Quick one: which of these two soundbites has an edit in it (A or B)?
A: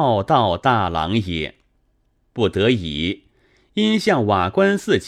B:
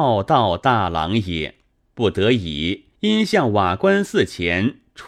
B